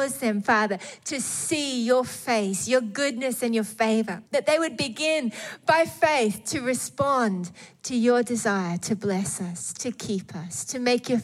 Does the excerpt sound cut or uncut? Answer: cut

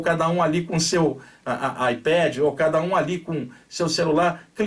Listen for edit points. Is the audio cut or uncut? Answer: uncut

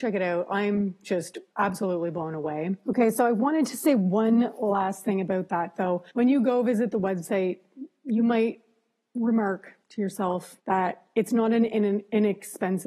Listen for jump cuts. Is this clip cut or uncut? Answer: cut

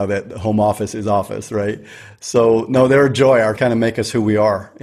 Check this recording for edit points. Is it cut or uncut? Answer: cut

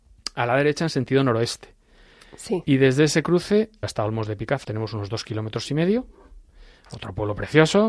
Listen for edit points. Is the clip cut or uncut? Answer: cut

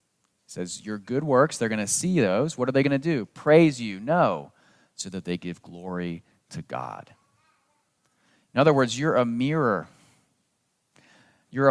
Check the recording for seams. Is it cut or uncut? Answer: uncut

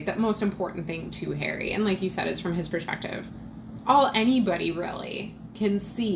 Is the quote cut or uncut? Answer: uncut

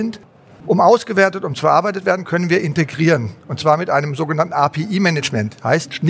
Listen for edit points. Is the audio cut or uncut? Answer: uncut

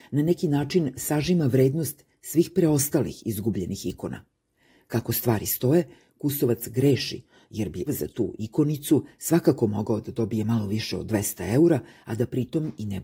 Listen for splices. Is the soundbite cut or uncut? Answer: cut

